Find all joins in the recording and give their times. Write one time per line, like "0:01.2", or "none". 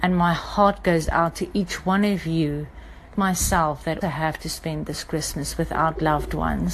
0:03.1
0:04.0